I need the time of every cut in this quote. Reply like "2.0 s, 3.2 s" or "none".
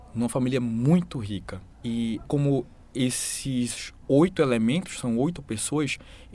1.7 s, 2.3 s, 4.0 s